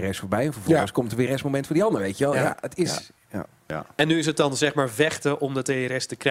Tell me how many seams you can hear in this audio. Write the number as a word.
one